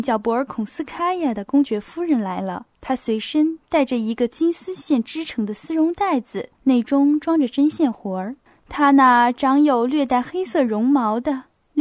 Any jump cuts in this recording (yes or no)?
yes